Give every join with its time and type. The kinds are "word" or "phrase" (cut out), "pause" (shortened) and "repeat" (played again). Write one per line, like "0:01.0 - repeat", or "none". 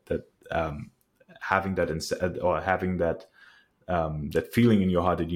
none